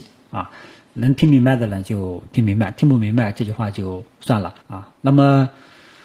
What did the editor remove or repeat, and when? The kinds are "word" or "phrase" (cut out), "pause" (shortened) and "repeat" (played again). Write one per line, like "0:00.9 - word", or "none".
0:04.6 - pause